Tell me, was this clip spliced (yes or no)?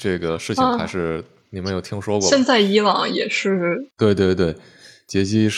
yes